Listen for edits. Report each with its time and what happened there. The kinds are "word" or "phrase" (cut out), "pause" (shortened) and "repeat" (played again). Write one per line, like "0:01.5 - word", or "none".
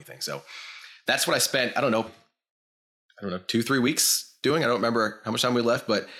0:02.1 - word